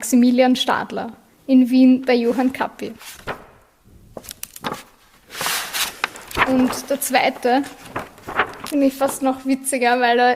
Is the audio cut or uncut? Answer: uncut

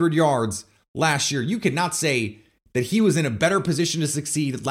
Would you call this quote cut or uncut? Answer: uncut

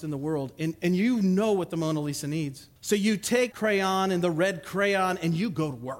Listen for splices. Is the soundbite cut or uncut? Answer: cut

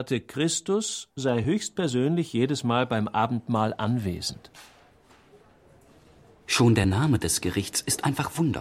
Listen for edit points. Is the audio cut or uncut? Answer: uncut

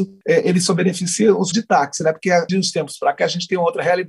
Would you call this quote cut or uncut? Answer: cut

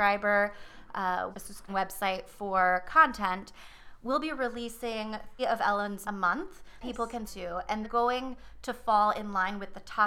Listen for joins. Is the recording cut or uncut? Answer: cut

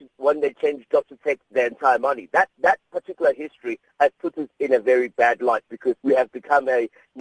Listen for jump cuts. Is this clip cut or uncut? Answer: cut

